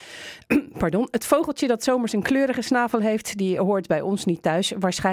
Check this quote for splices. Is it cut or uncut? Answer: uncut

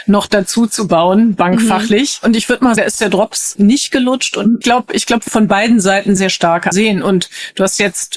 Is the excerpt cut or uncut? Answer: cut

